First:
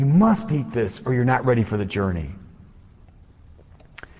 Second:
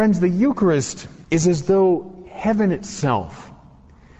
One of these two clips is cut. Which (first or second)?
second